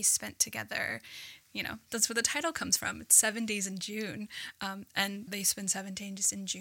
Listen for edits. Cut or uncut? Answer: cut